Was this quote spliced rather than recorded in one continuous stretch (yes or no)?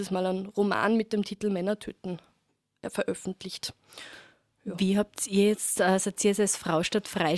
no